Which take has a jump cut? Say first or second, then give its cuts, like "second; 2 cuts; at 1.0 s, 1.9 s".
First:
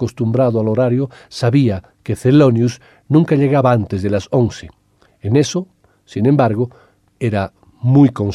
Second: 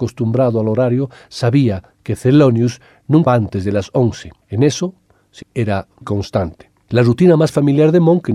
second; 4 cuts; at 3.3 s, 4.4 s, 5.4 s, 6.0 s